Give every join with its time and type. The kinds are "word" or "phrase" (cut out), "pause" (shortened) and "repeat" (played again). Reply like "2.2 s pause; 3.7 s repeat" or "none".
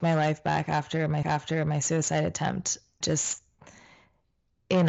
1.2 s repeat; 3.0 s word